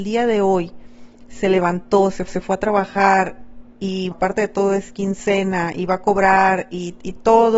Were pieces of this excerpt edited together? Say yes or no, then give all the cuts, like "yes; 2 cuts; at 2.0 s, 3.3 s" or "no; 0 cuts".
yes; 2 cuts; at 2.3 s, 4.1 s